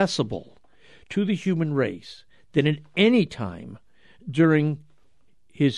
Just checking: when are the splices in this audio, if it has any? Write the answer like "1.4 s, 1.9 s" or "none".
none